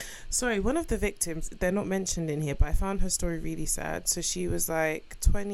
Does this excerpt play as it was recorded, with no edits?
yes; 0 cuts

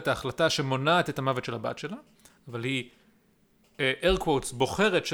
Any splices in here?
no; 0 cuts

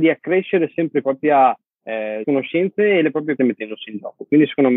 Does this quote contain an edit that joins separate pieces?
yes; 3 cuts; at 1.0 s, 2.2 s, 3.4 s

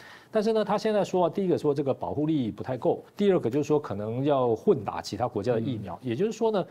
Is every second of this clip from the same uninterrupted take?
no; 1 cut; at 3.1 s

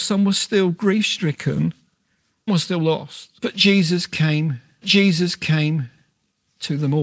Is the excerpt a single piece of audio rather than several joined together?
no; 3 cuts; at 2.5 s, 3.4 s, 4.8 s

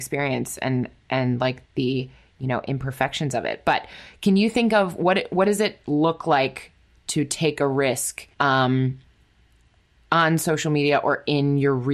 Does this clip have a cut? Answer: yes; 2 cuts; at 1.6 s, 8.3 s

